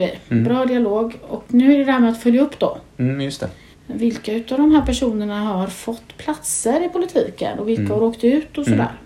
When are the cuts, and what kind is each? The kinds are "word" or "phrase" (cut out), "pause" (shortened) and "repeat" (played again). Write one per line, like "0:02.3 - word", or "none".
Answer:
0:03.7 - pause